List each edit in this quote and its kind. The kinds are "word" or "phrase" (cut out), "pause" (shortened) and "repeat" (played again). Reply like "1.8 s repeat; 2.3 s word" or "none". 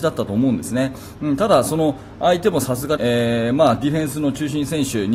3.0 s phrase